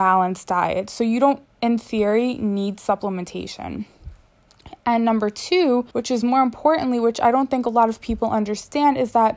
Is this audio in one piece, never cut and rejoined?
no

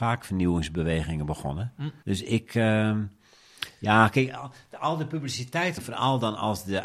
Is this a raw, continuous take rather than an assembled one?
no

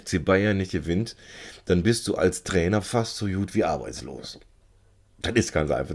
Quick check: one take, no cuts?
yes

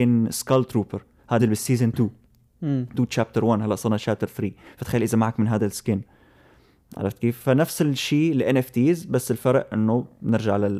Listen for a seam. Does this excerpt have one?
yes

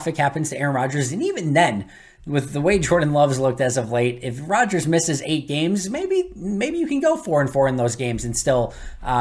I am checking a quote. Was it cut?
no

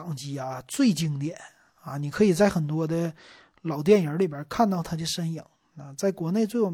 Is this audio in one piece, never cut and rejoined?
yes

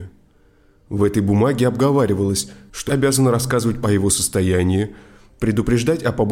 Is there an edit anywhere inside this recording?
yes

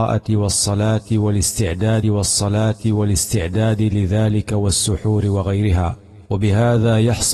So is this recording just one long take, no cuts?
no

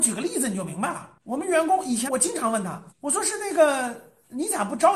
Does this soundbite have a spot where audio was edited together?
yes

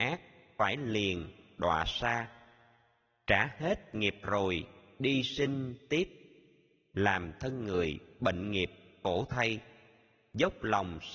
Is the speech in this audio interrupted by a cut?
no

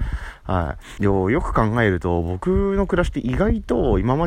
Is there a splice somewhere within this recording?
yes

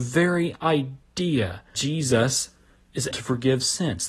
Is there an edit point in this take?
yes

